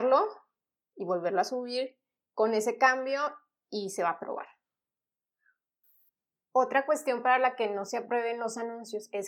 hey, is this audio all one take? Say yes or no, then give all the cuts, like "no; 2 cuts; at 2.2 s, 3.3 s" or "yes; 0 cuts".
yes; 0 cuts